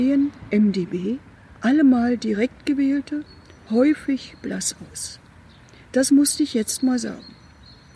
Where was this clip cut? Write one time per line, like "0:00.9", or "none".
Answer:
none